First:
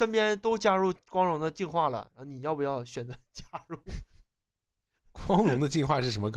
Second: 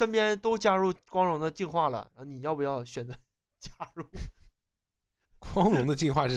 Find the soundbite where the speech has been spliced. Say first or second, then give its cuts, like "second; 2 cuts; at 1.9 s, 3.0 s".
first; 1 cut; at 3.2 s